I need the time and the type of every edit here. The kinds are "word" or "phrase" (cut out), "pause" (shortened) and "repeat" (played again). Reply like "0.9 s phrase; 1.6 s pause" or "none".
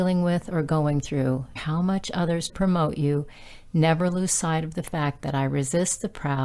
1.6 s phrase; 2.5 s phrase